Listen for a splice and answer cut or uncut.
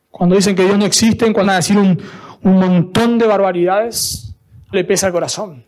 cut